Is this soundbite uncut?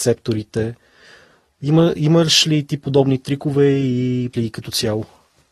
no; 1 cut; at 4.3 s

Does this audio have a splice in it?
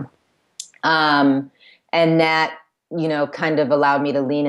no; 0 cuts

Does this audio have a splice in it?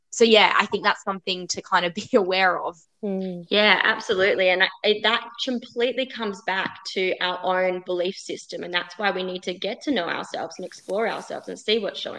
yes; 1 cut; at 2.8 s

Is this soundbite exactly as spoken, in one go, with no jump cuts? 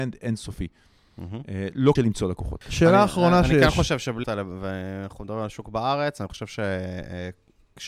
no; 2 cuts; at 2.0 s, 4.2 s

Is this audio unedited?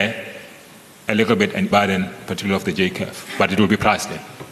no; 1 cut; at 1.7 s

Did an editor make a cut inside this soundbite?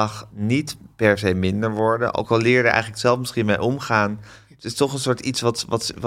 no; 0 cuts

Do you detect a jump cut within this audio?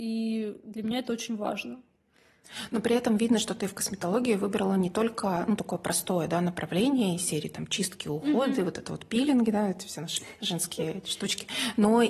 no; 0 cuts

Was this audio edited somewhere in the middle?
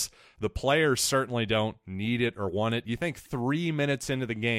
no; 0 cuts

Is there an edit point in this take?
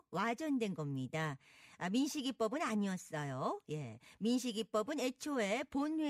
no; 0 cuts

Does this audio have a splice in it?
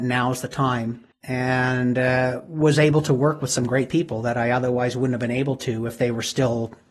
yes; 1 cut; at 1.1 s

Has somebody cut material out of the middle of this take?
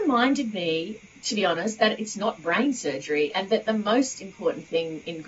no; 0 cuts

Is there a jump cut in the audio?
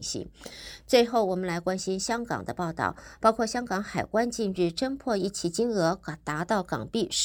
no; 0 cuts

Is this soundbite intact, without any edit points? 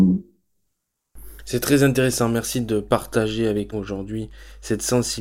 no; 1 cut; at 3.7 s

